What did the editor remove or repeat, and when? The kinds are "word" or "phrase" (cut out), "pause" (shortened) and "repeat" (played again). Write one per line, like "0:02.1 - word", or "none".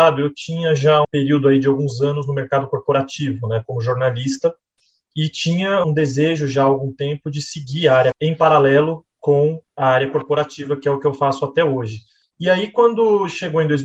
0:01.0 - word
0:05.8 - word
0:08.1 - word
0:09.7 - pause